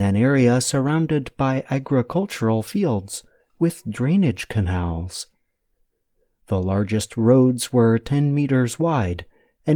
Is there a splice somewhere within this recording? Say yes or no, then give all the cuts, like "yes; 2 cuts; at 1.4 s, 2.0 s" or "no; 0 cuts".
no; 0 cuts